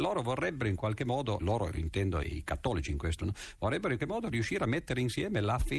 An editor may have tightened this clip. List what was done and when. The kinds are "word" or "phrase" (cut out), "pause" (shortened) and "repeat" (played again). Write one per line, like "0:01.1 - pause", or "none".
0:01.4 - word
0:02.2 - word
0:03.2 - word
0:04.0 - word